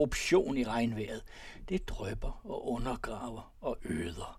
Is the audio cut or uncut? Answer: uncut